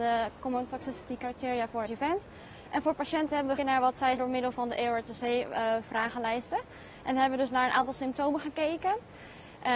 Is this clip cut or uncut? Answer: cut